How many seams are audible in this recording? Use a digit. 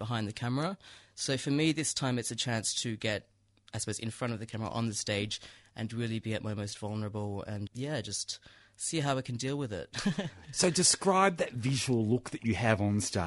1